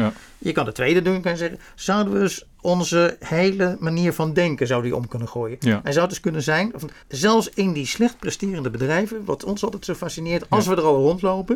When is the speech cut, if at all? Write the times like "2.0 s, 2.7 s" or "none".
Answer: 7.0 s